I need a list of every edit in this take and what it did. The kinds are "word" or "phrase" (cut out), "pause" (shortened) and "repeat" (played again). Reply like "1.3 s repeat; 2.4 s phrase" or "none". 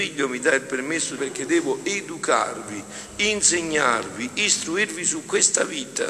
1.2 s phrase